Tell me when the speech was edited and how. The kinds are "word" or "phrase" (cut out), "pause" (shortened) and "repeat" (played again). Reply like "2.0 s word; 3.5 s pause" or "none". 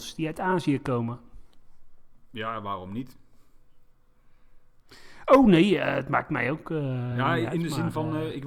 none